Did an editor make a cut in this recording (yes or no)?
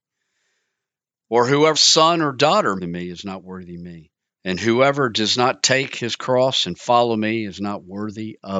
yes